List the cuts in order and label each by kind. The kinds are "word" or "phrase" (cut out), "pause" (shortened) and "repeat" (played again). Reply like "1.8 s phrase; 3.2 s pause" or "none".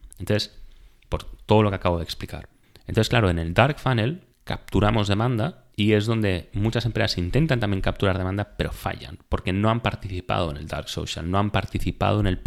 2.6 s pause; 4.3 s pause; 5.7 s pause